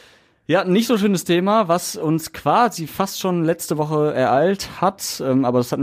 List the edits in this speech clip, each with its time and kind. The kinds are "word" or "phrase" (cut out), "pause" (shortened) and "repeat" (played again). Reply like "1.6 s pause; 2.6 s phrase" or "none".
none